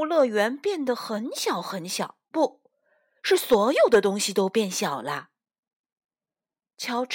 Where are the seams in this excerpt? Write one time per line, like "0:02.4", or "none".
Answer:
0:02.2